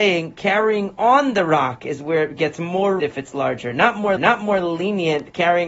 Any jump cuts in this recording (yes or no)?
yes